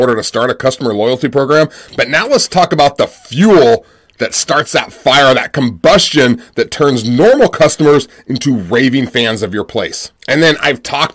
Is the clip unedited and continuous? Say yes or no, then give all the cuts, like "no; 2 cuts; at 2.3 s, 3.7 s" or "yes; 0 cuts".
yes; 0 cuts